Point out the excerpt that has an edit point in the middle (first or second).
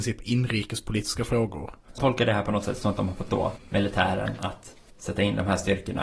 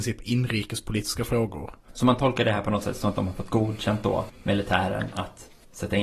first